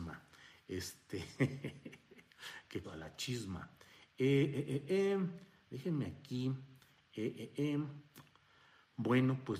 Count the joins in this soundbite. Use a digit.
2